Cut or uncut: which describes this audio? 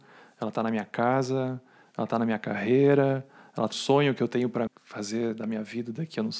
cut